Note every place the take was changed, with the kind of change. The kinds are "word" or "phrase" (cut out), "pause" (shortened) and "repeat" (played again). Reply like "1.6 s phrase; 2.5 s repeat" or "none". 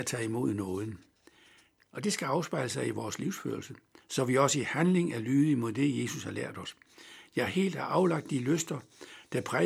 none